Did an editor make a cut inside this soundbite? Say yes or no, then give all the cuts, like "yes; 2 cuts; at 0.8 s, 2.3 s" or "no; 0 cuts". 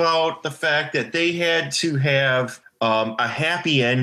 yes; 1 cut; at 2.6 s